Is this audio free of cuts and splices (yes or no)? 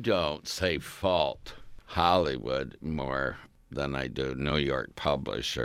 yes